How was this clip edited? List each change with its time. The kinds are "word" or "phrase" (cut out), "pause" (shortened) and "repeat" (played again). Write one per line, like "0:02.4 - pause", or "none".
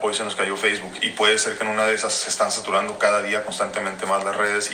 none